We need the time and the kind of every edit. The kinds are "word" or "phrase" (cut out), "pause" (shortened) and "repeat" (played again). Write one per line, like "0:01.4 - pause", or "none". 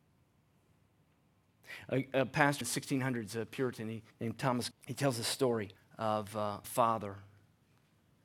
0:02.6 - word
0:04.1 - pause
0:04.7 - word
0:05.8 - pause
0:06.6 - phrase